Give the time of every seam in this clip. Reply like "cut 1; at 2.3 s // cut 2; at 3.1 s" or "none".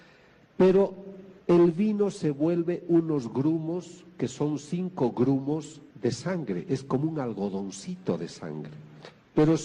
cut 1; at 1.4 s // cut 2; at 5.9 s